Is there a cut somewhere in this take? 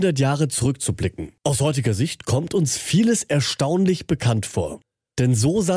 yes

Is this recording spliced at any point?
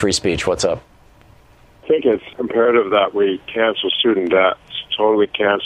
no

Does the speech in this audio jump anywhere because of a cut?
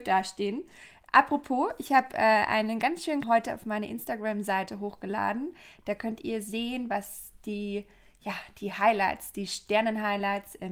yes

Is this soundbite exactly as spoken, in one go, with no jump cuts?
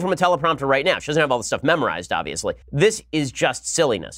no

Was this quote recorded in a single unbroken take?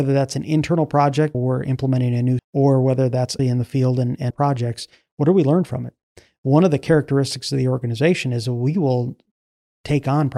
no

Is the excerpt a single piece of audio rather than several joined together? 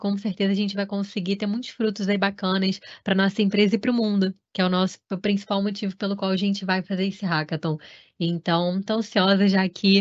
no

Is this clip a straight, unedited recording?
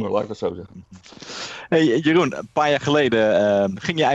yes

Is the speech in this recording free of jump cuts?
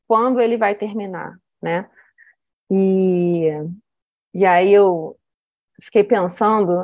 yes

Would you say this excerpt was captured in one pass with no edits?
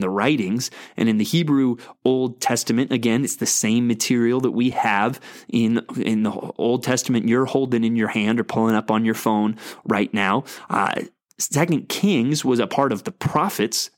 yes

